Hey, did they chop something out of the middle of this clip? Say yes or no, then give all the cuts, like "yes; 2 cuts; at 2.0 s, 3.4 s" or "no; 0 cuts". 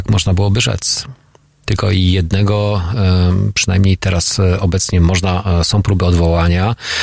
no; 0 cuts